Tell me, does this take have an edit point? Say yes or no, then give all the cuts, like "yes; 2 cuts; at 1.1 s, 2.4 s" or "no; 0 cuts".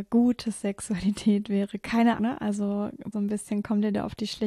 yes; 2 cuts; at 2.2 s, 3.1 s